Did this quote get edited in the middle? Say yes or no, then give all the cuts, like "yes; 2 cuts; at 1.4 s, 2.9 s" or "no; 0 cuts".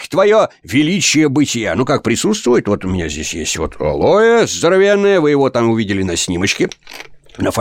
no; 0 cuts